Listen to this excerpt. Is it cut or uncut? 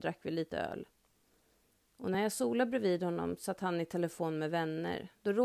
uncut